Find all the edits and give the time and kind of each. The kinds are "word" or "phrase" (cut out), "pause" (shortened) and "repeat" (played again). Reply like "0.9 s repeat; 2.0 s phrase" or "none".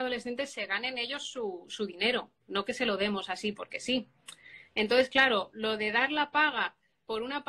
none